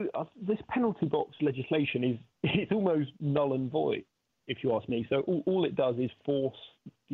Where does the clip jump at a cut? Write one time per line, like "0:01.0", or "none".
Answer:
0:02.3
0:03.2